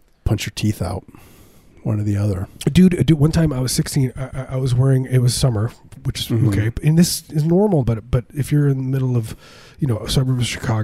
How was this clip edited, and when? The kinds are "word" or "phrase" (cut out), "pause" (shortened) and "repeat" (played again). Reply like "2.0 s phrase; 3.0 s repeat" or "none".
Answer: 4.3 s repeat; 7.8 s word